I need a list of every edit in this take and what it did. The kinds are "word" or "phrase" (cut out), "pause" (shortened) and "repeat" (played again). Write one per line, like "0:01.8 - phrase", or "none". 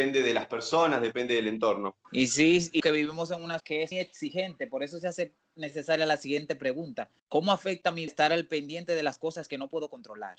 0:02.0 - pause
0:02.8 - word
0:03.6 - word
0:03.9 - word
0:07.2 - pause
0:08.1 - word